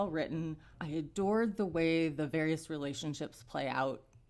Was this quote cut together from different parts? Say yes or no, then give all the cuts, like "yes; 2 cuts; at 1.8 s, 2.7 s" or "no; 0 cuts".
no; 0 cuts